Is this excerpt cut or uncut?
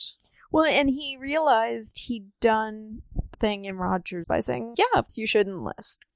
cut